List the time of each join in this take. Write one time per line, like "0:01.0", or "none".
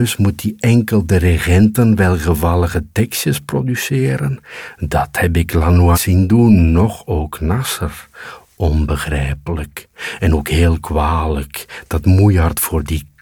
0:05.9